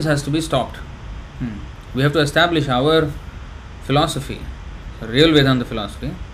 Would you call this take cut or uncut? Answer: uncut